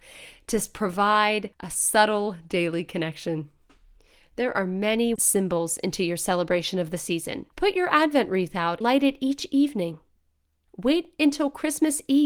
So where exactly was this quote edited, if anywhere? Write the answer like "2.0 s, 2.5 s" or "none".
1.5 s, 4.0 s, 5.2 s, 7.5 s, 8.8 s